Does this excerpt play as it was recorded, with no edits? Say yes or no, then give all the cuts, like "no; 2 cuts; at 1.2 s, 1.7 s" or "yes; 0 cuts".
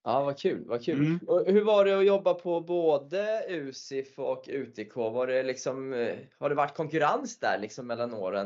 yes; 0 cuts